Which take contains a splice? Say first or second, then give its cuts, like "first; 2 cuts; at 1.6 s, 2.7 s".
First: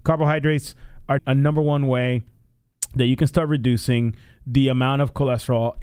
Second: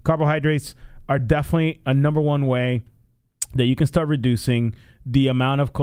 first; 1 cut; at 1.2 s